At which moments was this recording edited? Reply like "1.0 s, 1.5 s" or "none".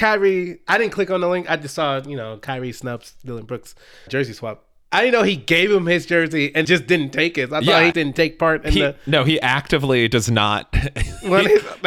4.1 s, 6.6 s, 7.9 s

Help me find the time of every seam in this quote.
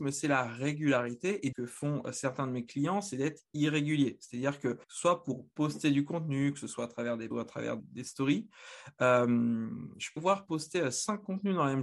1.5 s, 4.8 s, 7.3 s, 7.8 s, 10.2 s

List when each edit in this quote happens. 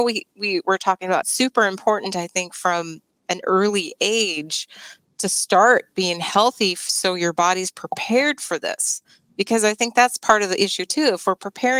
1.2 s

